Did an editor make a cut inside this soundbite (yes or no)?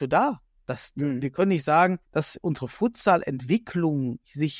yes